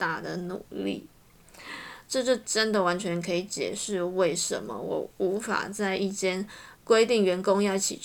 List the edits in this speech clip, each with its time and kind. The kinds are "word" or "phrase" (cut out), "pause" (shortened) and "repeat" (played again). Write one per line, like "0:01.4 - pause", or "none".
0:06.8 - pause